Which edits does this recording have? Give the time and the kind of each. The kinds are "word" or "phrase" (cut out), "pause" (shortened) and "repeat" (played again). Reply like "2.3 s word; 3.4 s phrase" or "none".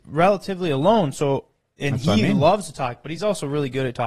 none